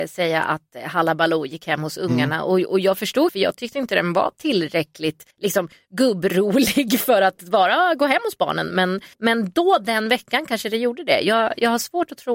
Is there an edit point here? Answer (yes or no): yes